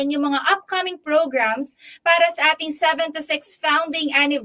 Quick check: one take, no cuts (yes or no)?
yes